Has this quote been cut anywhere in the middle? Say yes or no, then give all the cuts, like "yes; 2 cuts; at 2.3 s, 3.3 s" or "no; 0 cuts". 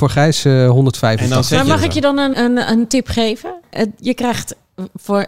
yes; 1 cut; at 2.3 s